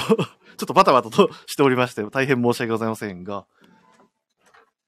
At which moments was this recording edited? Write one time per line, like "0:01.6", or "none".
none